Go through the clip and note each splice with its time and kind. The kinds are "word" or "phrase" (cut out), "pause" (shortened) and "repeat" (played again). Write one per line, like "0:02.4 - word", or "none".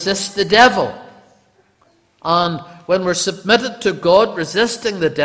none